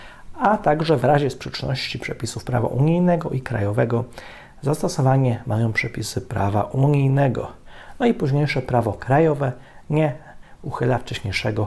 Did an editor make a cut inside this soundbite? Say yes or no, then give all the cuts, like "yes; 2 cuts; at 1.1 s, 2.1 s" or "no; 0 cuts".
no; 0 cuts